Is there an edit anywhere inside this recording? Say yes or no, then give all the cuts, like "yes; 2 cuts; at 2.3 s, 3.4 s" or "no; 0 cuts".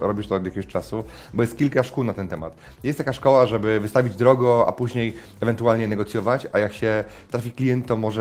no; 0 cuts